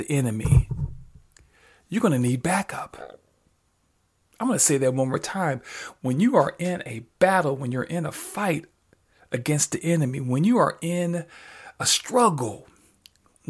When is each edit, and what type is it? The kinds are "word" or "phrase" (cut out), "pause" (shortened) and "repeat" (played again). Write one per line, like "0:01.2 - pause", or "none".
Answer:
none